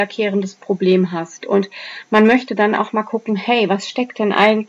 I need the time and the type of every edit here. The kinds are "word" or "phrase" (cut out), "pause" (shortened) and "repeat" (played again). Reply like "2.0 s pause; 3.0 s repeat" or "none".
none